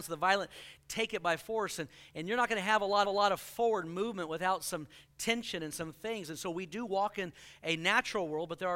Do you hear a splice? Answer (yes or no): yes